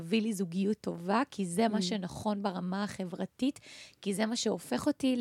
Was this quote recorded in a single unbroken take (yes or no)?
yes